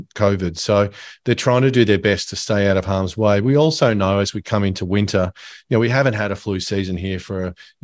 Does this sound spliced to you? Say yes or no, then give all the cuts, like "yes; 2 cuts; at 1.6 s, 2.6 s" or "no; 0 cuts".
no; 0 cuts